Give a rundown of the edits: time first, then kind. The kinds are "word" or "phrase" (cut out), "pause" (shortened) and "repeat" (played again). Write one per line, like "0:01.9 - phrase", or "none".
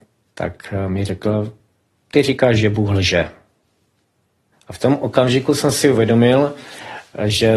none